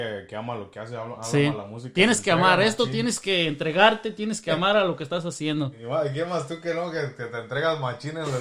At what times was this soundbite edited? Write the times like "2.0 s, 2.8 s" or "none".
none